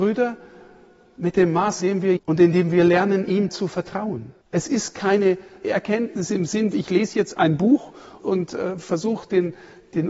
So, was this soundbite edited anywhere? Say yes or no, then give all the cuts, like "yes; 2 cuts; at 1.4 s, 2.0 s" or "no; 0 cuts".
yes; 6 cuts; at 1.8 s, 2.2 s, 4.4 s, 5.6 s, 6.7 s, 8.2 s